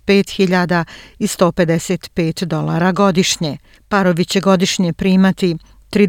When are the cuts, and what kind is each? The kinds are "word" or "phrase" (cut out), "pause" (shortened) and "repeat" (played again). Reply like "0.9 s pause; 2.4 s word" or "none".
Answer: none